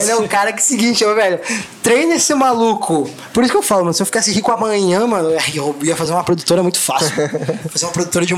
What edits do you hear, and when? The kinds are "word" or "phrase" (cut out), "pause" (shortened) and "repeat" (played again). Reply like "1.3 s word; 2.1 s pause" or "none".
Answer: none